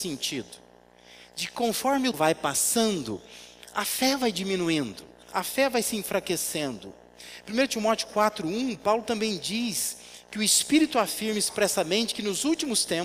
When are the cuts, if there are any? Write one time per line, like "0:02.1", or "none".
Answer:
0:02.1
0:05.2